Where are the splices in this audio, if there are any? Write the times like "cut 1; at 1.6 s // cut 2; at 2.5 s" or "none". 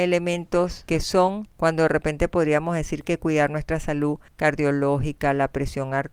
cut 1; at 1.5 s // cut 2; at 3.0 s // cut 3; at 4.3 s